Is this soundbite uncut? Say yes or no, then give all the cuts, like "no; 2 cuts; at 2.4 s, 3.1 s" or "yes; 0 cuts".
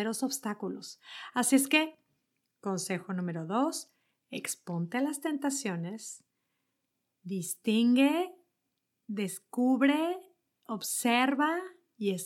yes; 0 cuts